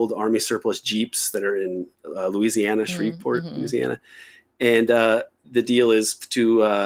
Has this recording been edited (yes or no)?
no